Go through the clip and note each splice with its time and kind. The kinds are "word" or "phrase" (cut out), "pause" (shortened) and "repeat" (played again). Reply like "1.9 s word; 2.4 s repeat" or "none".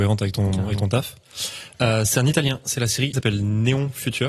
3.1 s phrase